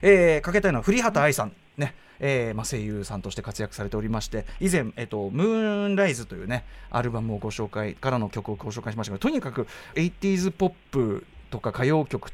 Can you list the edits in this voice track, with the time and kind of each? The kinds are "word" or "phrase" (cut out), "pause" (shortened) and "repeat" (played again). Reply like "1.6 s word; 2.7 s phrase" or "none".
9.9 s phrase